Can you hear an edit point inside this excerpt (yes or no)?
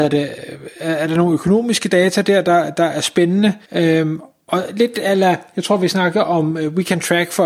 yes